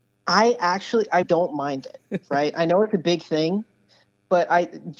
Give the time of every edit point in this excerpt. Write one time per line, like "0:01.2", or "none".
0:01.2
0:02.0